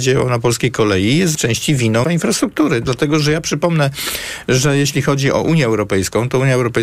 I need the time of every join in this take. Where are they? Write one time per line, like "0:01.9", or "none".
0:01.3
0:02.0